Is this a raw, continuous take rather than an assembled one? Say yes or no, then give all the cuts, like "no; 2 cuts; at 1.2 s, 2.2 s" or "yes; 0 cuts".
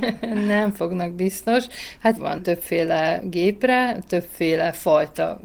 no; 1 cut; at 2.2 s